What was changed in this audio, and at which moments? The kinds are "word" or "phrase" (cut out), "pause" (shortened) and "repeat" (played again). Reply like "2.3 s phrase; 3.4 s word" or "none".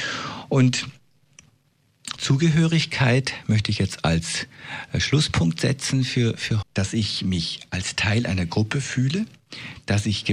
2.2 s word; 6.6 s phrase